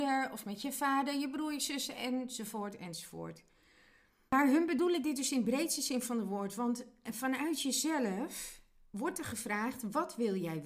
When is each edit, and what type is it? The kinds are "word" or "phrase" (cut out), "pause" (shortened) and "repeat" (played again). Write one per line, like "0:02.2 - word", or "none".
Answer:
none